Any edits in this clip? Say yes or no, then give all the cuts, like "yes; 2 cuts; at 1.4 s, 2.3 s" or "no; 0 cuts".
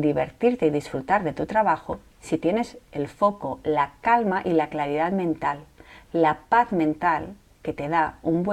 no; 0 cuts